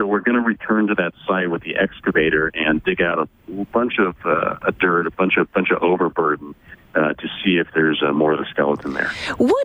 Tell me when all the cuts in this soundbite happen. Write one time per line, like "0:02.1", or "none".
none